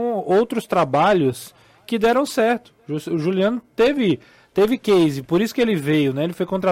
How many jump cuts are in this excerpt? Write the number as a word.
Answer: zero